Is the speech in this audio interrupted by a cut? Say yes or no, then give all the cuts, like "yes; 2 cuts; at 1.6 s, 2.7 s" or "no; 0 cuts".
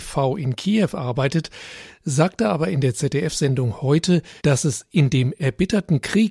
yes; 1 cut; at 4.4 s